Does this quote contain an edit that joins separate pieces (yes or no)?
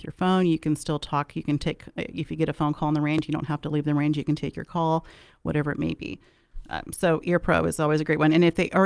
no